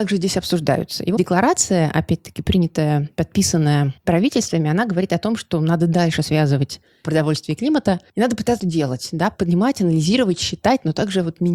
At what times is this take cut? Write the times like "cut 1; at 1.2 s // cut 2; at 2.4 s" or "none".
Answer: cut 1; at 1.2 s // cut 2; at 7.0 s // cut 3; at 8.6 s